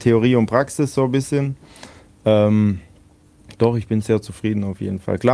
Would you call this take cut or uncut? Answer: uncut